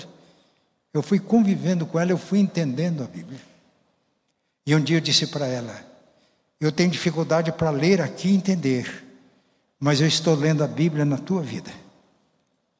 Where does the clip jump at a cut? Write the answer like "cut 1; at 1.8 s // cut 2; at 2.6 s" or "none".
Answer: none